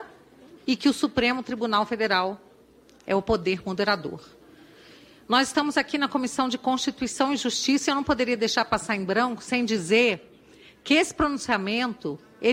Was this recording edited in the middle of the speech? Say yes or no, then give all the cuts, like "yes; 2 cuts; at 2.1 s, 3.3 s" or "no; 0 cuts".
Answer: no; 0 cuts